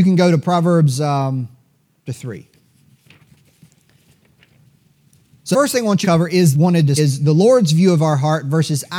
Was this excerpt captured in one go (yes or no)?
no